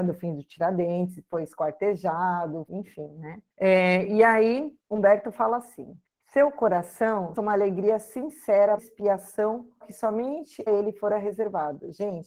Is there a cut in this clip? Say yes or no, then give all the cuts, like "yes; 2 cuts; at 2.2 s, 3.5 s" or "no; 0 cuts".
yes; 8 cuts; at 2.7 s, 3.5 s, 4.8 s, 6.0 s, 7.4 s, 8.8 s, 9.8 s, 10.7 s